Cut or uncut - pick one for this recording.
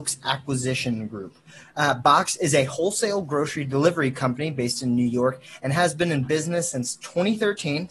uncut